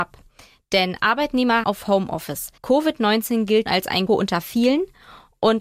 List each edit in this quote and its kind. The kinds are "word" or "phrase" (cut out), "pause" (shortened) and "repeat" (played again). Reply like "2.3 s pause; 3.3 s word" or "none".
1.6 s phrase; 2.6 s pause; 3.7 s word; 4.1 s word